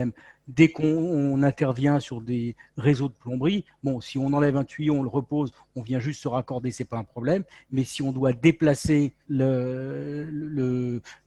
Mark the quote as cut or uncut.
cut